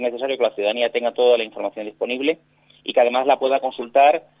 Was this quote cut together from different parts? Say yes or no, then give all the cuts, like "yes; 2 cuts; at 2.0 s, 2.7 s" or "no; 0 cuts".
no; 0 cuts